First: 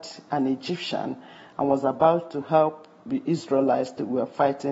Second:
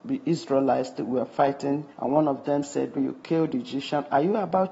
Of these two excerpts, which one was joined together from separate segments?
second; 2 cuts; at 1.9 s, 3.0 s

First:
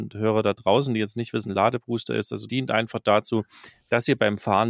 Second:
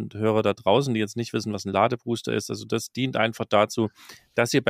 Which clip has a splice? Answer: first; 2 cuts; at 1.5 s, 2.5 s

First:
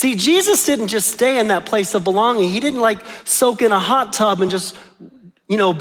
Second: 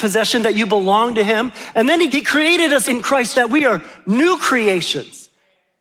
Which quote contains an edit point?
second; 3 cuts; at 2.1 s, 2.9 s, 3.3 s

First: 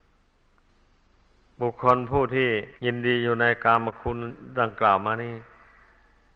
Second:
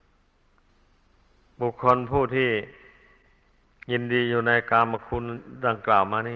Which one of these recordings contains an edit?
first; 1 cut; at 2.8 s

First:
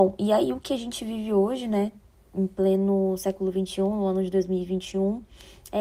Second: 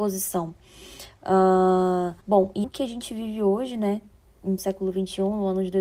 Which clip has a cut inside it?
second; 3 cuts; at 2.2 s, 2.6 s, 4.6 s

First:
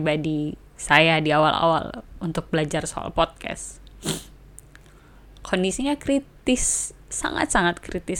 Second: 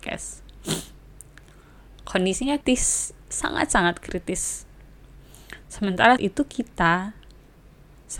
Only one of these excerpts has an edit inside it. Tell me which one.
second; 2 cuts; at 2.6 s, 6.2 s

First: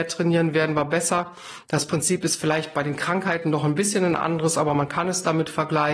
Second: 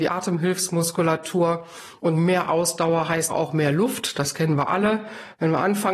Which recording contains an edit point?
second; 1 cut; at 3.3 s

